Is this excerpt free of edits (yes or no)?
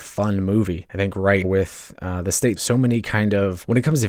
no